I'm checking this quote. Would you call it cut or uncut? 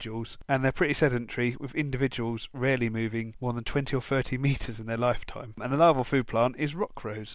uncut